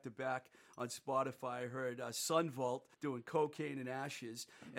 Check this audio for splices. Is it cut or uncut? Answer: cut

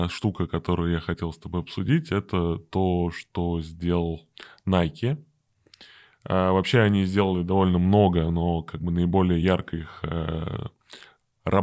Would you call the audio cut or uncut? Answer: uncut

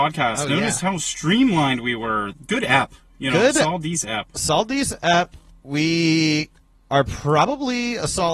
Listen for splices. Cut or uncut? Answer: uncut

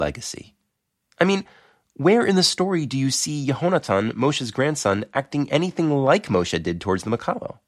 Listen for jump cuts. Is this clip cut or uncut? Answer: uncut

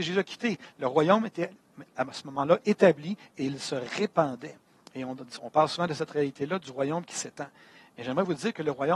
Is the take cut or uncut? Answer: uncut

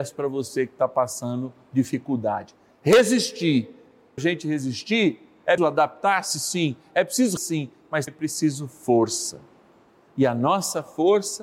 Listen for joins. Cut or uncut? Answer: cut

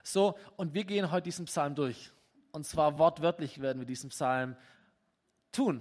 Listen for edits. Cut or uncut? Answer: uncut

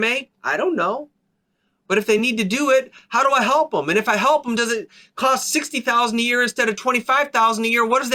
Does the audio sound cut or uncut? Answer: uncut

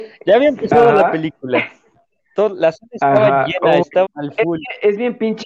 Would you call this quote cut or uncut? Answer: cut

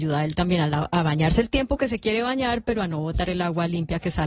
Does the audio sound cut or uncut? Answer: uncut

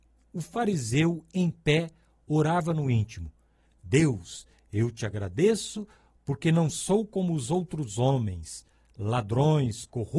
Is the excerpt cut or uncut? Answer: uncut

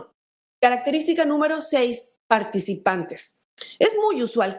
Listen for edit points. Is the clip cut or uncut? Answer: uncut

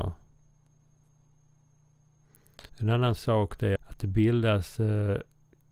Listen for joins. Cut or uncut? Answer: cut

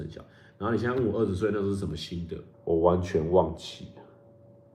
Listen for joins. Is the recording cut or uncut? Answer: cut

